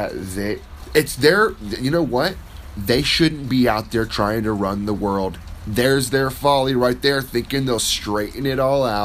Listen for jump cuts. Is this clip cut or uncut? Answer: uncut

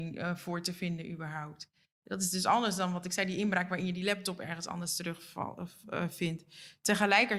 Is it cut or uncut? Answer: uncut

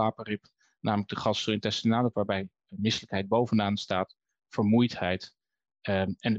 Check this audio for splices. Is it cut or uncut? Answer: cut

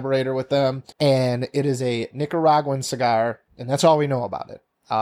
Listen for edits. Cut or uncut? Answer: cut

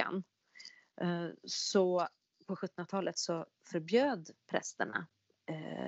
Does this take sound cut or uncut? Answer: uncut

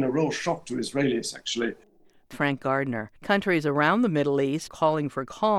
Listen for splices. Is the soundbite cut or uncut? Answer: cut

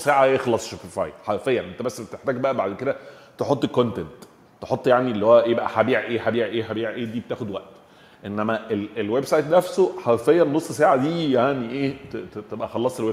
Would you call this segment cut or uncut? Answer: uncut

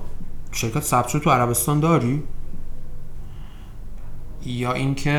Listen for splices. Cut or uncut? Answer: uncut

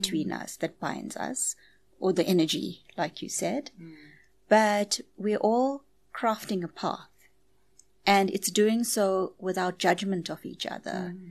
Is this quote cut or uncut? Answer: uncut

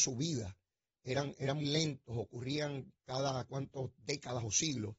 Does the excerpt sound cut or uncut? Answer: cut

